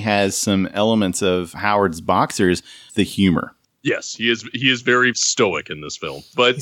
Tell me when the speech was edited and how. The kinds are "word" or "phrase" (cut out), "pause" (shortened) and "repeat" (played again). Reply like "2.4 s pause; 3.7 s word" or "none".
2.9 s word; 5.1 s word